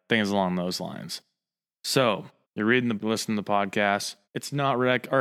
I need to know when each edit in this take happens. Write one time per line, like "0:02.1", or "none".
0:02.4
0:03.0
0:04.2